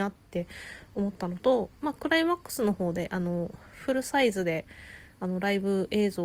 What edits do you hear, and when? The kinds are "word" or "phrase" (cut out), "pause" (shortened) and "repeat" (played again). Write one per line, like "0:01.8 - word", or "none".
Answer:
0:03.7 - pause